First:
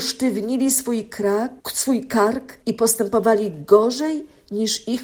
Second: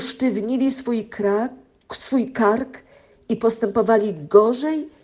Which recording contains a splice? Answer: first; 2 cuts; at 1.6 s, 2.6 s

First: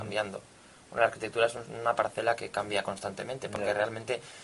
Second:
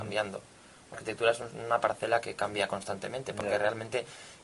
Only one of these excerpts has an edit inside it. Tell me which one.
second; 1 cut; at 0.9 s

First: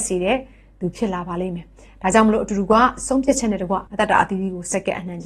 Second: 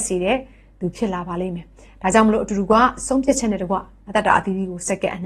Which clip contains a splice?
first; 1 cut; at 3.9 s

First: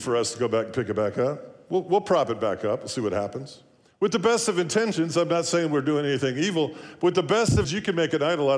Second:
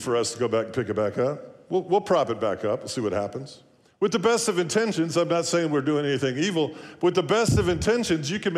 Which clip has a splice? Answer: first; 1 cut; at 7.6 s

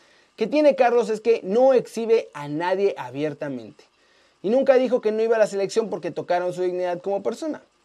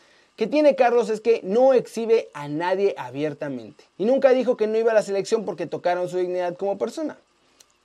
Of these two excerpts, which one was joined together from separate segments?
second; 1 cut; at 3.9 s

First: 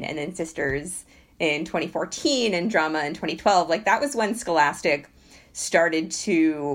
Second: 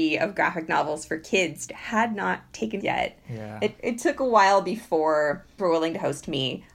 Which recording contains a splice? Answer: second; 4 cuts; at 1.7 s, 2.8 s, 3.8 s, 5.6 s

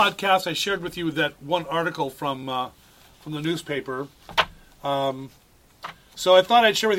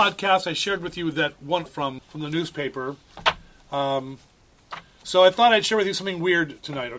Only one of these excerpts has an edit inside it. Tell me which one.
second; 2 cuts; at 1.7 s, 2.0 s

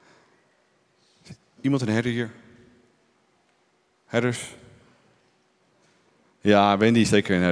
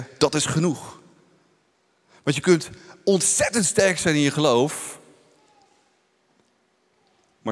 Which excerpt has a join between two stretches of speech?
first; 1 cut; at 1.6 s

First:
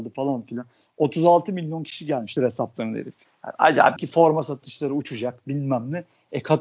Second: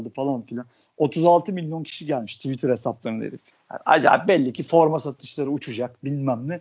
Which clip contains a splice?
first; 2 cuts; at 2.4 s, 4.0 s

